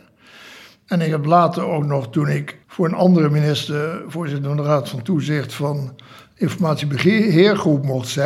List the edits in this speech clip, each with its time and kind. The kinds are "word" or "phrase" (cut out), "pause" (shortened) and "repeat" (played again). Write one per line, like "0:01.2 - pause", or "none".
0:02.6 - pause